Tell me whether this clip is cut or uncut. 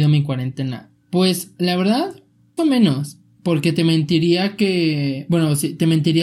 cut